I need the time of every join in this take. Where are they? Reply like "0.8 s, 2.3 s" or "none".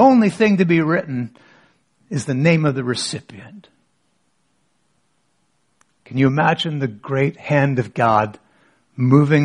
none